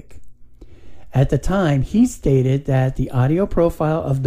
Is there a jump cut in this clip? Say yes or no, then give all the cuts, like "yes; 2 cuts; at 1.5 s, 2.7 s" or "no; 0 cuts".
no; 0 cuts